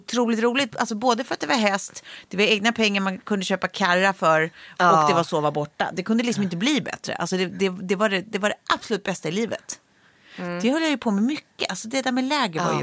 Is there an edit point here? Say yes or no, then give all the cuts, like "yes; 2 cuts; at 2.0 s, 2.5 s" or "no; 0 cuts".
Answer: no; 0 cuts